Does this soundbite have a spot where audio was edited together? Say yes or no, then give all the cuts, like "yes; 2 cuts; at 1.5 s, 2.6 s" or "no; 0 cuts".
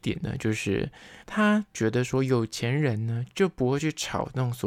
yes; 1 cut; at 1.2 s